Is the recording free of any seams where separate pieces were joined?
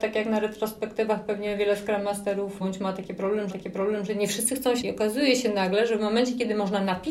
no; 3 cuts; at 2.6 s, 3.5 s, 4.8 s

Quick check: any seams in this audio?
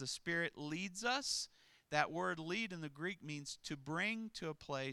no; 0 cuts

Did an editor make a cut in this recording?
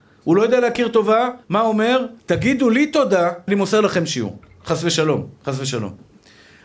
yes; 3 cuts; at 1.4 s, 2.2 s, 3.5 s

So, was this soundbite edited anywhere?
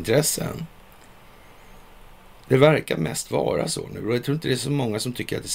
no; 0 cuts

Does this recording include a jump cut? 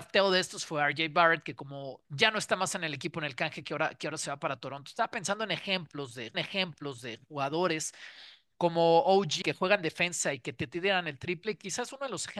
yes; 3 cuts; at 2.0 s, 6.3 s, 9.4 s

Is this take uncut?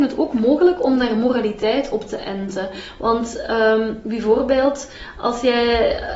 yes; 0 cuts

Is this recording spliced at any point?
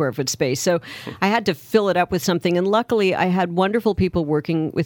no; 0 cuts

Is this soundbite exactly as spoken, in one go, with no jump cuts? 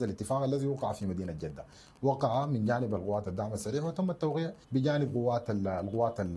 no; 1 cut; at 4.6 s

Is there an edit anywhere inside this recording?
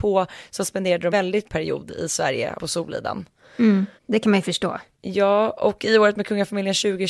yes; 5 cuts; at 1.1 s, 1.4 s, 2.6 s, 4.0 s, 4.9 s

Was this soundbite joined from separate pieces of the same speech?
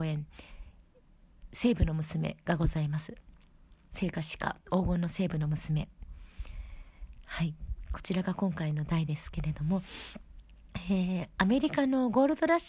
no; 0 cuts

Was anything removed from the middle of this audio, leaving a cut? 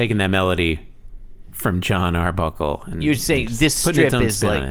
no; 0 cuts

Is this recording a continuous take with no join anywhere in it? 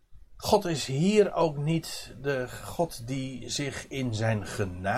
yes; 0 cuts

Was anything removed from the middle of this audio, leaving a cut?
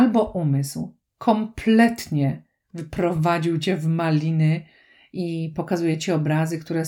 no; 0 cuts

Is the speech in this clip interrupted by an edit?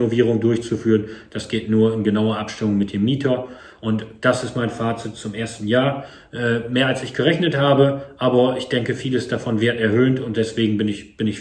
no; 0 cuts

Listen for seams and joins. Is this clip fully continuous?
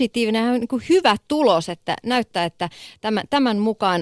yes; 0 cuts

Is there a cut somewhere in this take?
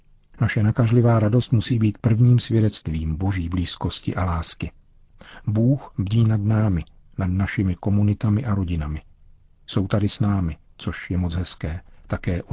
no; 0 cuts

